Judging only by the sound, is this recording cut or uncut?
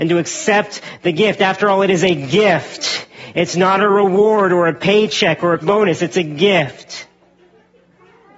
cut